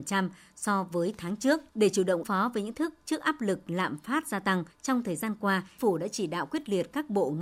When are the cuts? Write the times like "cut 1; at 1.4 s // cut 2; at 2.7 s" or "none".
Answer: cut 1; at 1.7 s // cut 2; at 2.2 s // cut 3; at 2.7 s // cut 4; at 4.7 s // cut 5; at 5.8 s